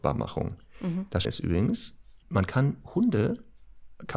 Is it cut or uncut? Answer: cut